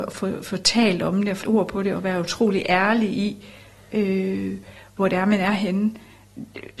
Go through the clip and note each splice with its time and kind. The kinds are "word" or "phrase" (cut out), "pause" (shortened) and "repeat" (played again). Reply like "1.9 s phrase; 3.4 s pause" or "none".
1.4 s word